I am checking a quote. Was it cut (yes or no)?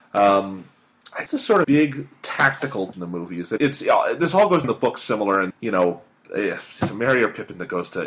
yes